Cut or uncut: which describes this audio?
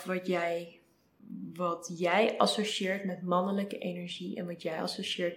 uncut